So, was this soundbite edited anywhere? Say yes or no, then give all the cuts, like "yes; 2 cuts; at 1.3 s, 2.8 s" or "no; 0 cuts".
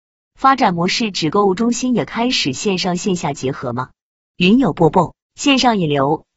yes; 1 cut; at 5.2 s